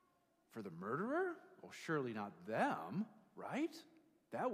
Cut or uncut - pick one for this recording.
uncut